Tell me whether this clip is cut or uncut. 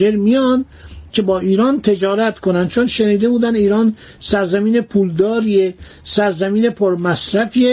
uncut